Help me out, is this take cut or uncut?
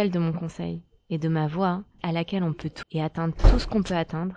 cut